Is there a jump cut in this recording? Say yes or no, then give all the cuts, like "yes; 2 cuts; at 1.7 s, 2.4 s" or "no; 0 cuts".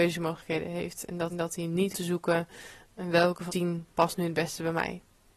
yes; 4 cuts; at 1.3 s, 1.9 s, 3.5 s, 3.9 s